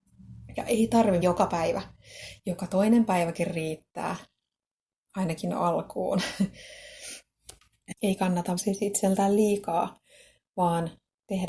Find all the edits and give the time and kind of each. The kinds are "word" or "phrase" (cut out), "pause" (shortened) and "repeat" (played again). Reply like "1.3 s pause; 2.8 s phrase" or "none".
1.2 s word; 8.0 s pause; 8.6 s word